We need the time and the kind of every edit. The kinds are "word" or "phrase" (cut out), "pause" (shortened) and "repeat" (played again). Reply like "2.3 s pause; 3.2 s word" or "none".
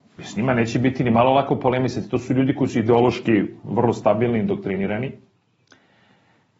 none